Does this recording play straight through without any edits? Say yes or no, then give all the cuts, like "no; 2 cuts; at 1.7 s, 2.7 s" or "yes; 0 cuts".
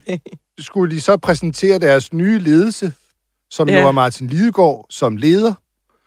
yes; 0 cuts